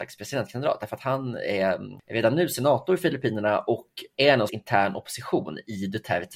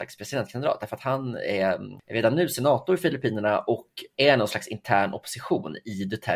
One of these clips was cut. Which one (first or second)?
first